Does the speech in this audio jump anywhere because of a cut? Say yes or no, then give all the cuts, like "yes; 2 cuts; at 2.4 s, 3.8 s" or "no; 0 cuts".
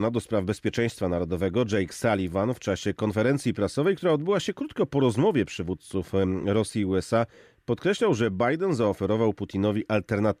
no; 0 cuts